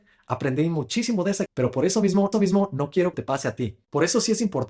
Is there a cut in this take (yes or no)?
yes